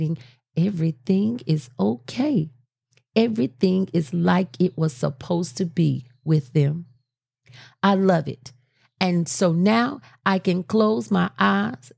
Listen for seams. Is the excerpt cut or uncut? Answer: uncut